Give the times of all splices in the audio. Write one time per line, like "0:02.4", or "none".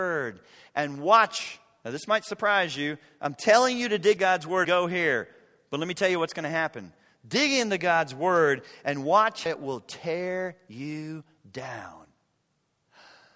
0:04.2
0:04.6
0:09.5

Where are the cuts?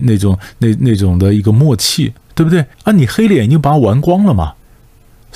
0:02.7

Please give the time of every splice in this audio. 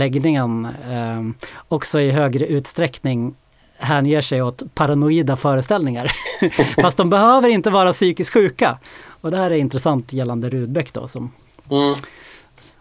none

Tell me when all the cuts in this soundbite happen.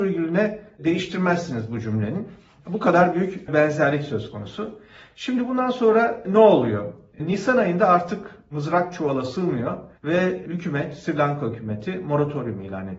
0:09.9

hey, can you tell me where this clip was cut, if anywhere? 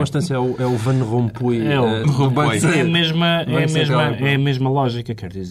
0:02.0

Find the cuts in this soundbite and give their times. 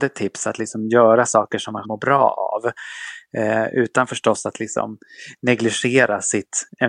0:01.8

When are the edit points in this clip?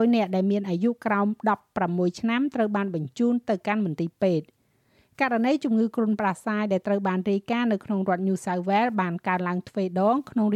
none

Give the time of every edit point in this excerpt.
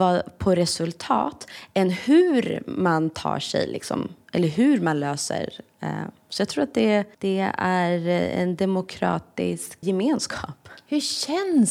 0:07.1
0:09.8

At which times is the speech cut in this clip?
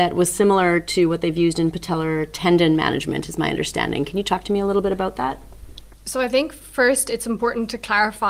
0:05.9

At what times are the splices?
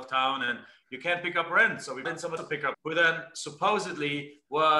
0:02.0
0:02.4
0:02.7

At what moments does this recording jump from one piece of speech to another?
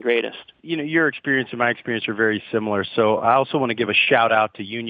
none

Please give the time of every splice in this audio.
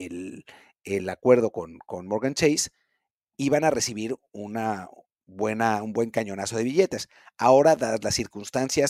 none

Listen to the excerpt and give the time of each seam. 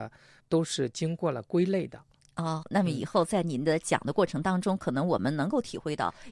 0:02.6

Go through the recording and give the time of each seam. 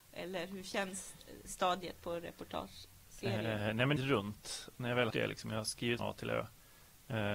0:04.0
0:05.1
0:06.0

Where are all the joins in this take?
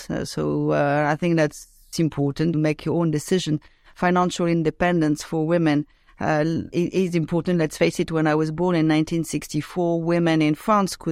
0:01.9
0:02.5
0:06.7

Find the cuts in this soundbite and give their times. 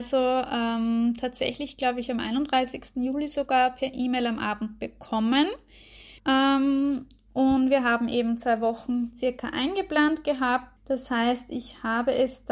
0:06.2
0:10.8

